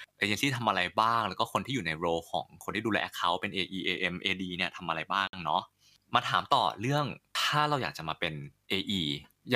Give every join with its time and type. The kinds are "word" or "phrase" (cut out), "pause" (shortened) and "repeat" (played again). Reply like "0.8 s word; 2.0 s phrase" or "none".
none